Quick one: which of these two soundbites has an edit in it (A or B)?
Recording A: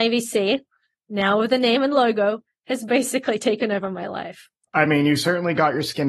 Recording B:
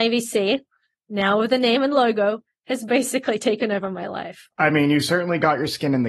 B